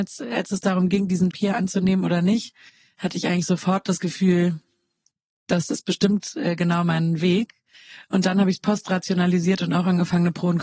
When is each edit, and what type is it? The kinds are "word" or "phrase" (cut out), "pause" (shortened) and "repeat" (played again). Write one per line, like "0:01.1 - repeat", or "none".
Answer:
0:01.3 - word